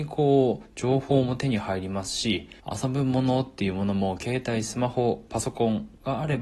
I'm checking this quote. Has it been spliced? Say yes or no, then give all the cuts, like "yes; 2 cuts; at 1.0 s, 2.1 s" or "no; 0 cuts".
yes; 2 cuts; at 2.6 s, 5.3 s